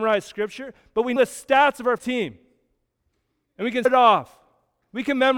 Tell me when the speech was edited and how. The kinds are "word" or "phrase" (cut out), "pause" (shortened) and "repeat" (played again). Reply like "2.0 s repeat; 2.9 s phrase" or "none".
1.2 s word; 2.0 s word; 3.8 s word

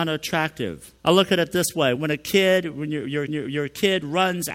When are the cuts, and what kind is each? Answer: 1.0 s pause; 2.0 s word; 3.3 s repeat

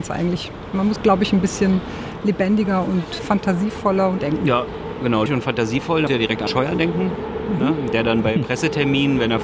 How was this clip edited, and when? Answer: 1.0 s word; 3.2 s word; 4.2 s word; 5.3 s word; 6.1 s word; 6.5 s word

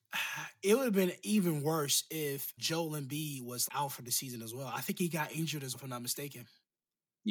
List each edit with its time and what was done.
2.6 s word; 3.7 s word; 5.7 s word

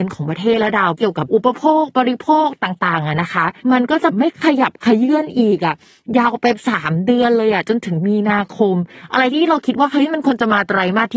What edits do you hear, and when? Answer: 3.6 s pause

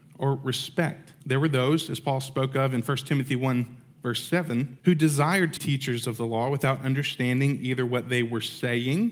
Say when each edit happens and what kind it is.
1.2 s pause; 4.8 s pause; 5.6 s word

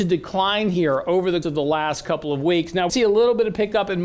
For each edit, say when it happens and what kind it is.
1.4 s word; 2.9 s word

